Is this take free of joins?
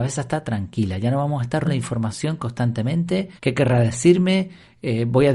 no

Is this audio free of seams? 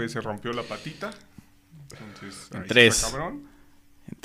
yes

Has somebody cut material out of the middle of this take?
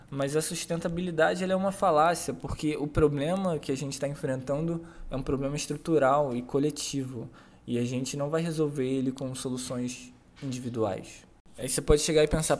no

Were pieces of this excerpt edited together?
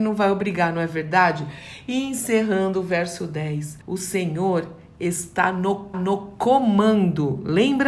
yes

